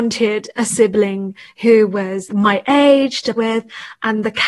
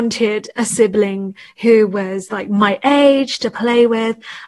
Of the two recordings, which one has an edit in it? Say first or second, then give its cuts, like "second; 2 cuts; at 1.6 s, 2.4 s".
first; 2 cuts; at 2.3 s, 3.4 s